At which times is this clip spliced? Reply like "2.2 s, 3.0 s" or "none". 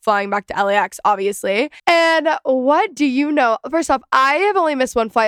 1.8 s